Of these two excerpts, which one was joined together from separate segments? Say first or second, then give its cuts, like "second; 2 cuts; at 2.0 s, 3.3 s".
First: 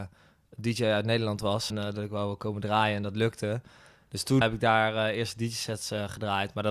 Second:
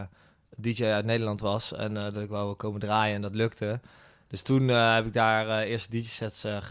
first; 2 cuts; at 1.7 s, 4.4 s